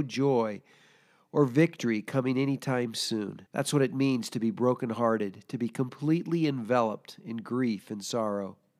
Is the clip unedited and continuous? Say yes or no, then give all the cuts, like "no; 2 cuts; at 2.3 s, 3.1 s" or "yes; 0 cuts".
no; 1 cut; at 3.5 s